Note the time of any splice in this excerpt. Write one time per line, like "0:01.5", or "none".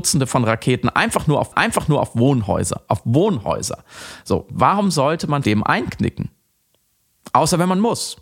0:01.5
0:05.4